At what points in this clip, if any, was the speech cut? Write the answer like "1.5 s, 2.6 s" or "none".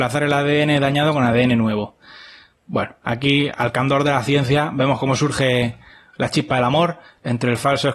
none